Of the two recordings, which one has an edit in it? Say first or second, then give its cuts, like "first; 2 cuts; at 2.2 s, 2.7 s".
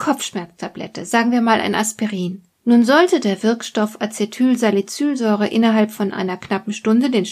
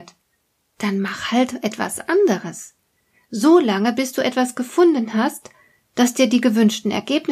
first; 1 cut; at 2.5 s